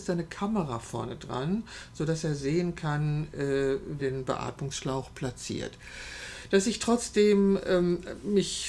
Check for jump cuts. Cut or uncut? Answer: cut